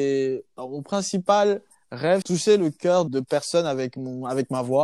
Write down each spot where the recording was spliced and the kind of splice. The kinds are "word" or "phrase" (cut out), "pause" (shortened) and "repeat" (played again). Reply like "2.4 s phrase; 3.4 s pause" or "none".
2.2 s phrase; 3.1 s word